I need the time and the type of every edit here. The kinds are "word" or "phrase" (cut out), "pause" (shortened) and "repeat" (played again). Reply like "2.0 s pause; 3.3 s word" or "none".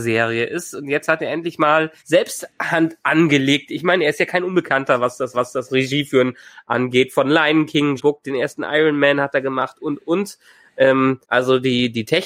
2.0 s pause; 5.3 s repeat; 8.0 s word; 9.8 s word; 11.2 s pause

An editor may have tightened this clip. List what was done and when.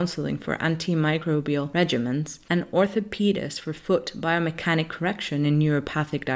none

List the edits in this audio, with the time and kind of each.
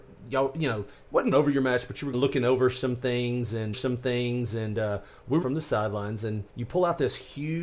1.3 s word; 2.1 s word; 3.7 s repeat; 5.4 s word; 6.5 s pause

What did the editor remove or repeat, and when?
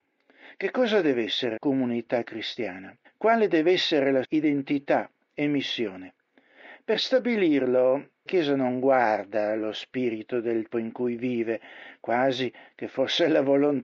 1.6 s word; 3.0 s pause; 4.2 s word; 8.3 s word; 10.7 s word

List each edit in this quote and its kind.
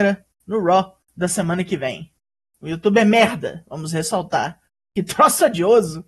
none

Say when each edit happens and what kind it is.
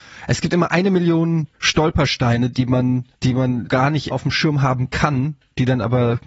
1.5 s pause; 3.1 s pause; 3.7 s word; 4.1 s word

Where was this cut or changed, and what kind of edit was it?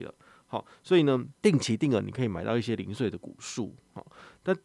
1.3 s pause

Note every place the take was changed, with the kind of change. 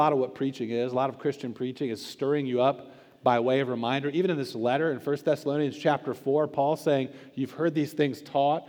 none

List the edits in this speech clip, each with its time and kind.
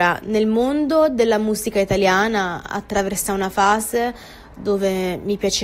none

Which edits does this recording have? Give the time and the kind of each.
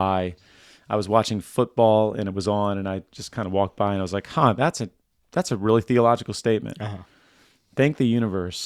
none

